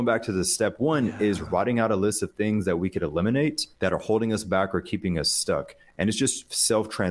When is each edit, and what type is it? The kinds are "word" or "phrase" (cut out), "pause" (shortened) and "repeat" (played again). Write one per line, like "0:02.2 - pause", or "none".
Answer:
0:03.7 - pause